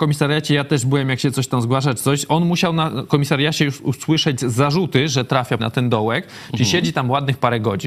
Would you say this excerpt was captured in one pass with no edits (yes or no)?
no